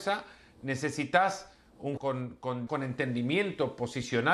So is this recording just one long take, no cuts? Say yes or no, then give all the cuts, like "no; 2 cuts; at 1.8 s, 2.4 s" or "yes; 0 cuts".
no; 2 cuts; at 2.0 s, 2.7 s